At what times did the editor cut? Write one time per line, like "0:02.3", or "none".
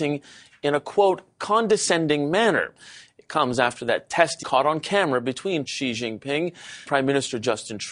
0:04.4
0:05.7
0:06.9